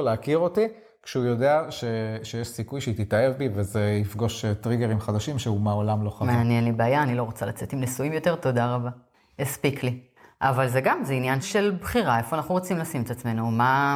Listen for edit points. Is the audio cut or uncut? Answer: cut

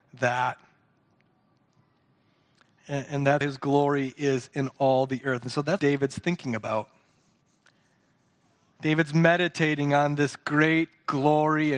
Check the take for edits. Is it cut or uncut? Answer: cut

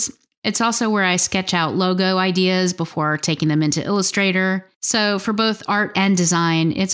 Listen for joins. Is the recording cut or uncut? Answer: cut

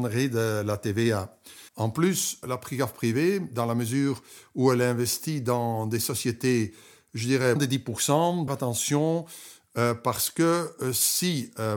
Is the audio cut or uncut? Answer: cut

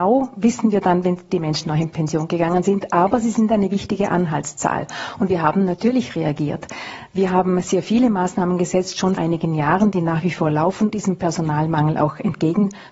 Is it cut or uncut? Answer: cut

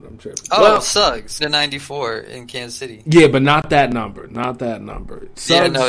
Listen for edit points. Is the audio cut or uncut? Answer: cut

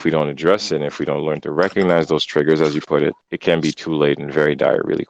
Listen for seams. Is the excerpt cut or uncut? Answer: cut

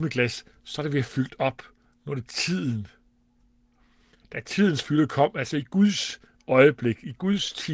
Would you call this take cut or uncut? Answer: uncut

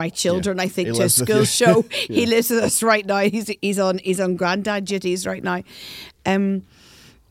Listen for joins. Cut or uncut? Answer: uncut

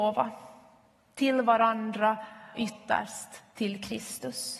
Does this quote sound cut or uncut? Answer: cut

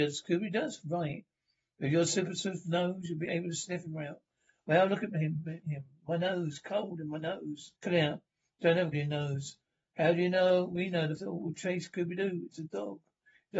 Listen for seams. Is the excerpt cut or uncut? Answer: cut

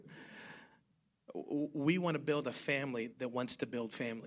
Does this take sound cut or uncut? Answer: uncut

